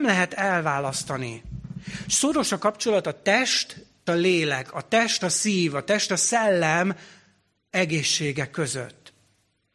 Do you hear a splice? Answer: yes; 3 cuts; at 4.1 s, 5.2 s, 6.1 s

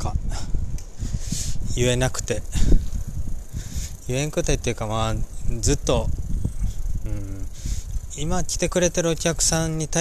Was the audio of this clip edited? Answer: no; 0 cuts

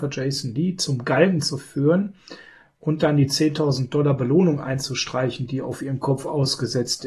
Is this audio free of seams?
yes; 0 cuts

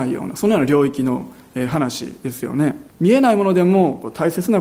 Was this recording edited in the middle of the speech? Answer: yes; 1 cut; at 2.9 s

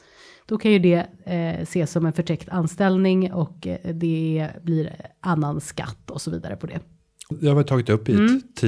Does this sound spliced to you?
yes; 1 cut; at 7.3 s

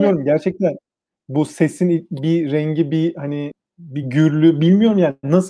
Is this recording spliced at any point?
no; 0 cuts

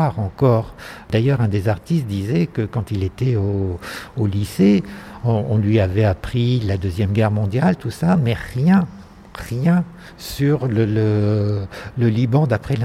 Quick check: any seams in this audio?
no; 0 cuts

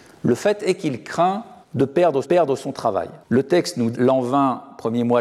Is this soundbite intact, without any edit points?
no; 4 cuts; at 1.6 s, 2.2 s, 3.2 s, 3.9 s

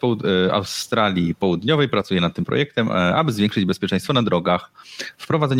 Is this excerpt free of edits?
yes; 0 cuts

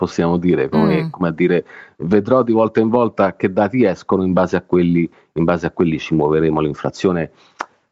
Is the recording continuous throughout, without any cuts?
yes; 0 cuts

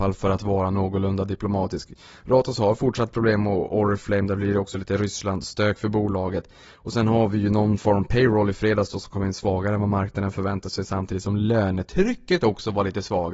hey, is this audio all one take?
yes; 0 cuts

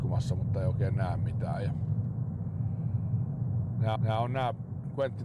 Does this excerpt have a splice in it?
yes; 1 cut; at 4.0 s

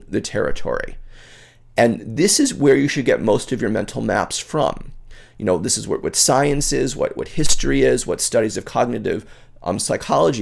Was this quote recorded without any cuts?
yes; 0 cuts

